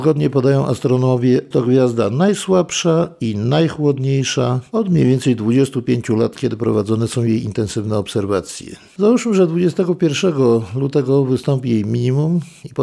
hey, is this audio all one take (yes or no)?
no